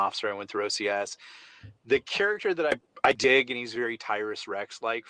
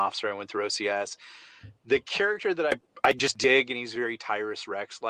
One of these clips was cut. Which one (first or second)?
first